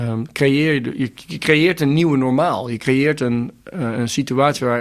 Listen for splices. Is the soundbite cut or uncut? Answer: uncut